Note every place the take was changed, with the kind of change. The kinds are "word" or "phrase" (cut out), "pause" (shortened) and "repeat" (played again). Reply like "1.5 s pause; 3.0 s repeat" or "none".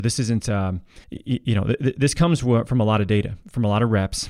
1.0 s pause